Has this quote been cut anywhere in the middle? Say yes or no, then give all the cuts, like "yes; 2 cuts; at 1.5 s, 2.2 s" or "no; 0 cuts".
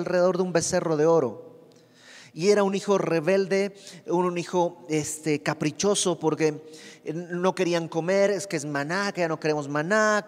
no; 0 cuts